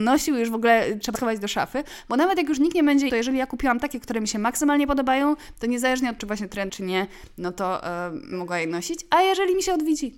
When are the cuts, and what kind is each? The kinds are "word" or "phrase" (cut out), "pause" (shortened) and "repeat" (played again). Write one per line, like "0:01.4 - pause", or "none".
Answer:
0:01.1 - word
0:03.1 - phrase
0:06.2 - word
0:06.7 - word
0:08.3 - word